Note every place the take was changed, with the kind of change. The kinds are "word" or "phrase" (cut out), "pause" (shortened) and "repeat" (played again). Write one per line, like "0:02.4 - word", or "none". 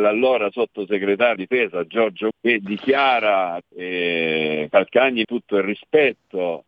0:01.4 - word
0:02.3 - word
0:03.6 - word
0:05.2 - word